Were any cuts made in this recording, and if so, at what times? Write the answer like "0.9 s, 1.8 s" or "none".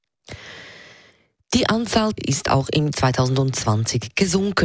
2.2 s, 2.9 s